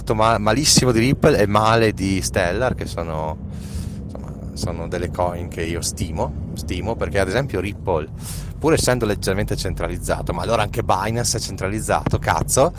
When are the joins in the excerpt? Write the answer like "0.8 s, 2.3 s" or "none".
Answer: none